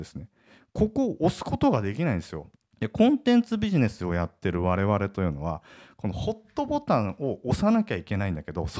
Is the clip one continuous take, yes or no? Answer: no